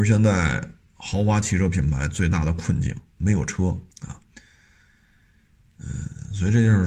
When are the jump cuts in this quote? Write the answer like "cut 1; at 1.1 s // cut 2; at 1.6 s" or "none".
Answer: cut 1; at 3.9 s